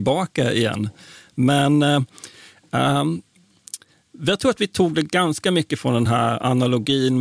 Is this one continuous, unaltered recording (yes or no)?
yes